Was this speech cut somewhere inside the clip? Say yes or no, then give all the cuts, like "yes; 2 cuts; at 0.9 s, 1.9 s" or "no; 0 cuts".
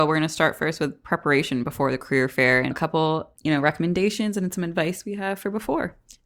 yes; 2 cuts; at 2.7 s, 3.4 s